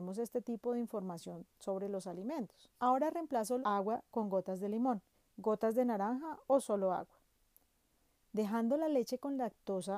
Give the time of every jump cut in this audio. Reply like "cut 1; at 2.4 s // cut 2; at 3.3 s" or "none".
cut 1; at 2.7 s // cut 2; at 3.6 s // cut 3; at 5.1 s